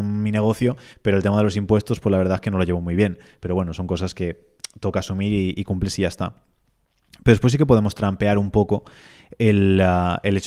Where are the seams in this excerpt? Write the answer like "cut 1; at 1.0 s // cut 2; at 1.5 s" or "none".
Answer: none